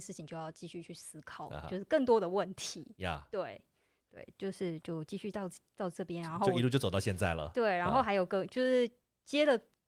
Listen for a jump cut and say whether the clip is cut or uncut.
uncut